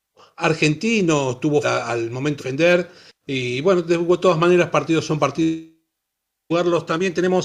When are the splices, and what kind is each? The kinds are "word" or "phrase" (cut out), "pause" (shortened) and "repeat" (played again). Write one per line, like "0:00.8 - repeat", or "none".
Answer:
0:01.6 - phrase
0:02.4 - word